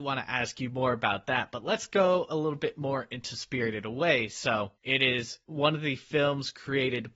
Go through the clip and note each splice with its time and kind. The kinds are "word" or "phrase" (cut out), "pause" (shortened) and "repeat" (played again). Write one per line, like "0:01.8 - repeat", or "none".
0:04.7 - pause
0:05.4 - pause